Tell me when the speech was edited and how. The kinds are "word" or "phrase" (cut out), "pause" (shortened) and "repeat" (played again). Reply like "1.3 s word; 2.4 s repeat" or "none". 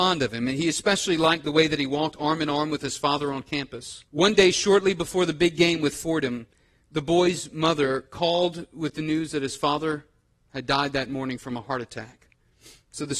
4.1 s pause